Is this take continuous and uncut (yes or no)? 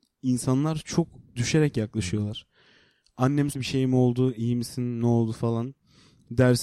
no